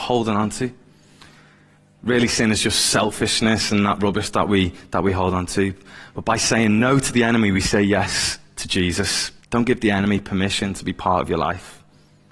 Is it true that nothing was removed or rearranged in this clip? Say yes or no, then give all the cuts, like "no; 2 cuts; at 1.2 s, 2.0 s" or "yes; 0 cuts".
no; 1 cut; at 9.4 s